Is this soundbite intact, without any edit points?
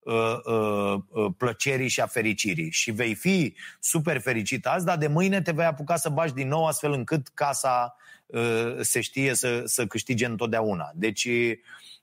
yes; 0 cuts

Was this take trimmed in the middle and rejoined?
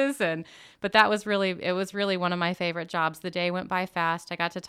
no; 0 cuts

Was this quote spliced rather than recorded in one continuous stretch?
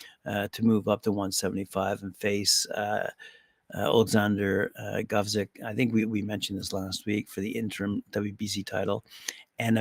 no; 0 cuts

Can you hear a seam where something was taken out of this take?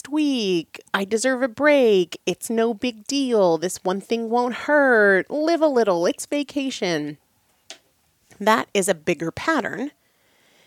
no; 0 cuts

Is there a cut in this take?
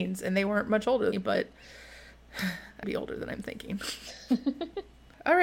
yes; 2 cuts; at 1.1 s, 2.8 s

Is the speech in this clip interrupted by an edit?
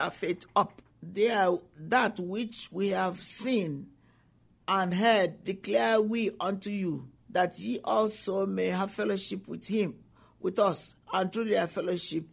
yes; 4 cuts; at 0.9 s, 7.2 s, 10.1 s, 11.0 s

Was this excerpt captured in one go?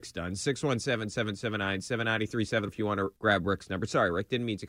no; 2 cuts; at 2.7 s, 3.2 s

